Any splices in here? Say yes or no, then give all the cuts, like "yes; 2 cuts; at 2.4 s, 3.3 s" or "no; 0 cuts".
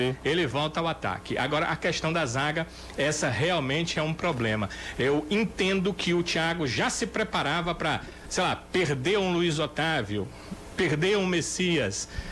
no; 0 cuts